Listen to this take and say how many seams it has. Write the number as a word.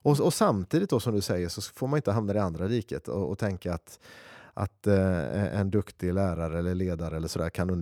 zero